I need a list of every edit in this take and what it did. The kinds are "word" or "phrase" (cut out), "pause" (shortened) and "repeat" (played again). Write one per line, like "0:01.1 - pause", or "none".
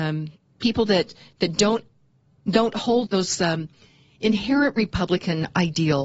0:03.1 - word